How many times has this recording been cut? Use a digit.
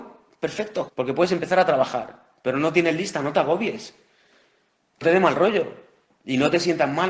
1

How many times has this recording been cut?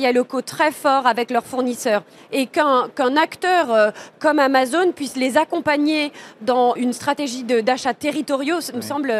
1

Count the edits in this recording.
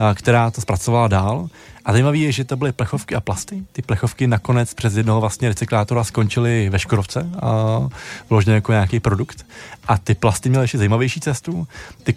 0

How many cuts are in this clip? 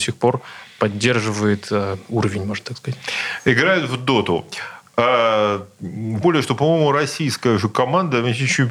1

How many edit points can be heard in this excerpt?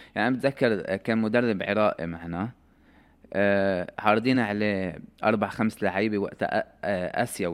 0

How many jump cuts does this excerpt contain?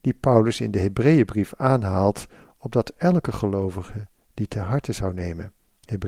0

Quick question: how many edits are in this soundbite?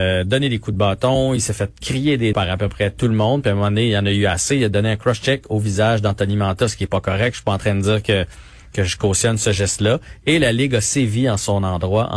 1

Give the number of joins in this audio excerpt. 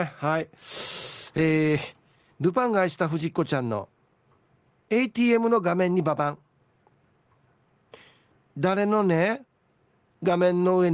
0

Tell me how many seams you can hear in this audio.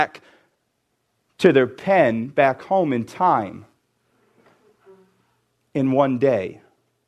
0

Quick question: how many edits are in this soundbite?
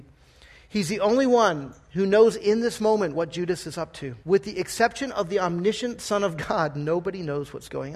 1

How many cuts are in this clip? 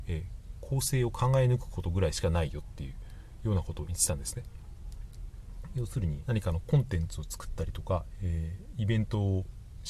1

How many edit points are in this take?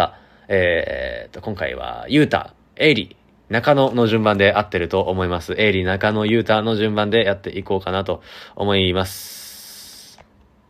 1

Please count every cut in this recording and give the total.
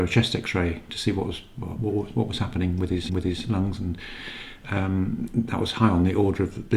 1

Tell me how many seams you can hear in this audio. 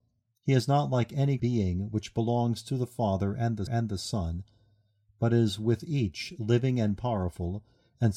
2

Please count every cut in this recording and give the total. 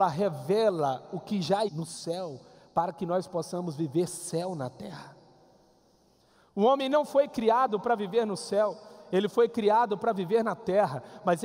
1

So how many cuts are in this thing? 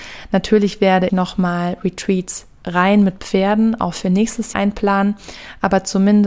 2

